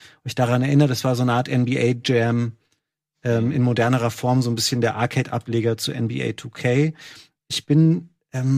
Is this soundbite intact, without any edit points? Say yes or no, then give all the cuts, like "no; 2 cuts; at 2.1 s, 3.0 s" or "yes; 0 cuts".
yes; 0 cuts